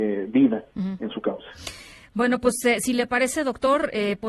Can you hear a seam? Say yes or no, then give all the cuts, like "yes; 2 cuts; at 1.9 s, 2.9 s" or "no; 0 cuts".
no; 0 cuts